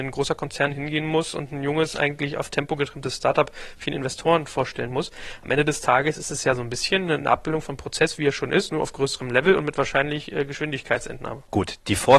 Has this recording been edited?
no; 0 cuts

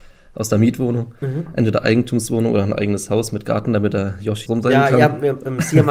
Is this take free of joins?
no; 1 cut; at 4.5 s

